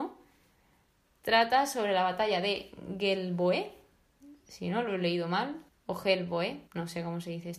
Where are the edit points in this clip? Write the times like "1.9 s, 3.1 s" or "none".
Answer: 5.7 s, 6.7 s